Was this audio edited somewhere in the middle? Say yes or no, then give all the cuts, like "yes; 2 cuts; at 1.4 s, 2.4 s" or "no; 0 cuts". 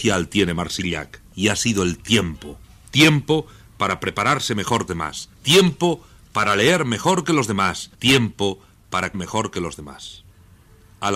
yes; 6 cuts; at 1.3 s, 2.6 s, 4.9 s, 5.3 s, 7.9 s, 9.1 s